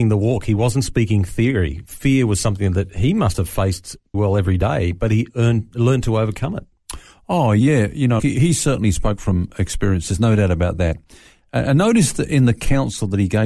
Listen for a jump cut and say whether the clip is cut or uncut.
cut